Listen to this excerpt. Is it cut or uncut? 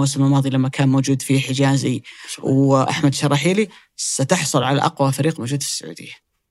uncut